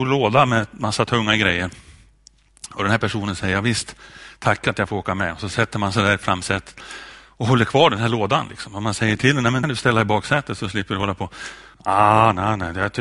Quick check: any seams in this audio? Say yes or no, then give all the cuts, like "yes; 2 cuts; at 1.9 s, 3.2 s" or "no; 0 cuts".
yes; 2 cuts; at 9.6 s, 11.7 s